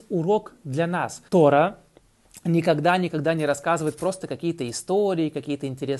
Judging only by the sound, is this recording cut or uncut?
cut